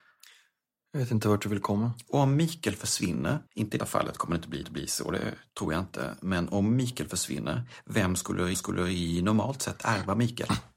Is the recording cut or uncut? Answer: cut